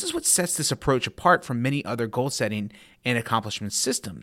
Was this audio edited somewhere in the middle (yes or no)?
no